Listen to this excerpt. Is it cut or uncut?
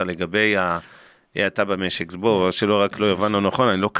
uncut